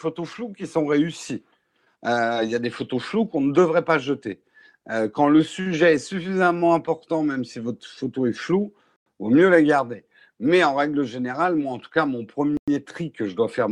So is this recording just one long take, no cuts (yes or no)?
yes